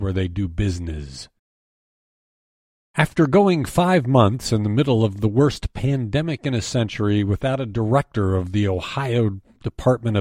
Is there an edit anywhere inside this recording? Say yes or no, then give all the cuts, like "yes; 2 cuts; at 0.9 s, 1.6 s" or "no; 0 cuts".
no; 0 cuts